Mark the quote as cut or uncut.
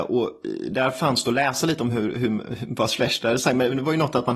uncut